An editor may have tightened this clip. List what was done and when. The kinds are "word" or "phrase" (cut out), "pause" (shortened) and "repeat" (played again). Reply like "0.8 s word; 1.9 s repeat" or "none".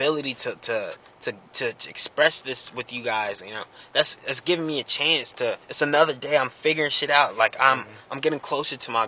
5.6 s pause